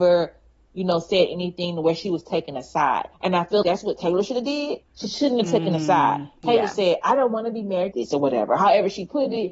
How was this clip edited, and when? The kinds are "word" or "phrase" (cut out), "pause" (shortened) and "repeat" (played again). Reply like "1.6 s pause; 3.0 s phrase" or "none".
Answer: 3.1 s pause; 3.6 s word; 7.9 s phrase